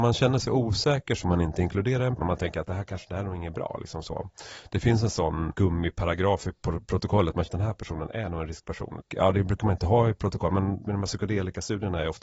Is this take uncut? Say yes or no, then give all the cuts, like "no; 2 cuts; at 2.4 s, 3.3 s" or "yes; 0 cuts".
no; 3 cuts; at 1.2 s, 2.2 s, 7.5 s